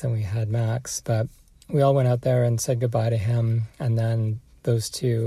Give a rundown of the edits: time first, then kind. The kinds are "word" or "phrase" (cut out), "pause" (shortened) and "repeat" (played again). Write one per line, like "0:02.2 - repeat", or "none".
none